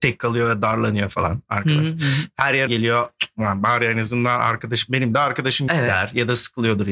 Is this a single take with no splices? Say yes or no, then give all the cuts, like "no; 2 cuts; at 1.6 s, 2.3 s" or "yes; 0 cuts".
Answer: no; 2 cuts; at 2.7 s, 5.7 s